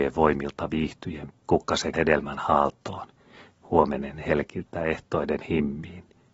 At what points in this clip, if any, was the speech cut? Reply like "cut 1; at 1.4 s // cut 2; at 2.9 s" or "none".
cut 1; at 1.3 s // cut 2; at 1.9 s